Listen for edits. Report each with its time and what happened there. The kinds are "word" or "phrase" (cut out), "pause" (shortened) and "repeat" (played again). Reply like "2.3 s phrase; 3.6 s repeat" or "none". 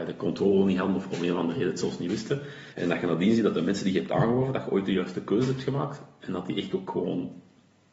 2.7 s pause